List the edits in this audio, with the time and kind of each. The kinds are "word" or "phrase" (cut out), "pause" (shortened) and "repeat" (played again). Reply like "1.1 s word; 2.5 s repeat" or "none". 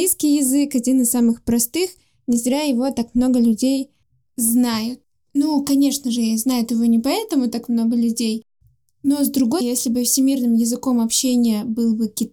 9.6 s word